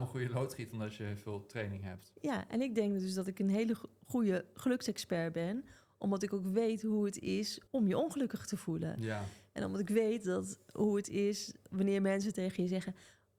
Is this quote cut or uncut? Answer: cut